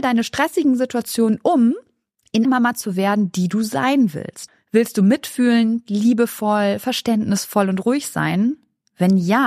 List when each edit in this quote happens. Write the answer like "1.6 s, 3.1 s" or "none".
2.4 s